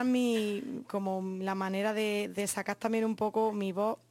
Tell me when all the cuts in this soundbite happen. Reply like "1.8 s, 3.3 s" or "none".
none